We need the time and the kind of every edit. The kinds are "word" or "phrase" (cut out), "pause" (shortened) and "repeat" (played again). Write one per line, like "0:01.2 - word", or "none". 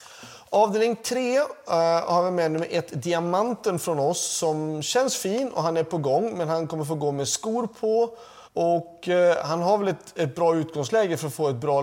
0:08.5 - pause